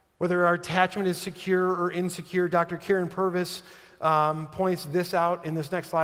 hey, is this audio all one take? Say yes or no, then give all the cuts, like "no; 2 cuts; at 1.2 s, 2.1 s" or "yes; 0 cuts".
yes; 0 cuts